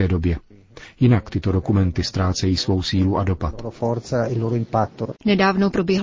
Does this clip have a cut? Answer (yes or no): no